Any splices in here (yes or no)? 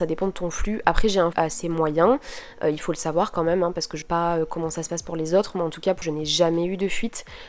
yes